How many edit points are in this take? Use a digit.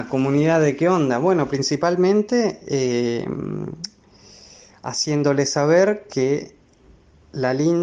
0